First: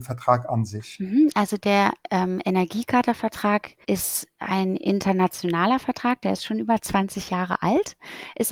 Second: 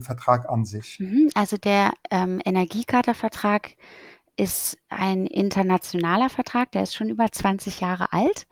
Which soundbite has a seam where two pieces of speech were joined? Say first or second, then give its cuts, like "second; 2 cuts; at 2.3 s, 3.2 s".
first; 1 cut; at 3.8 s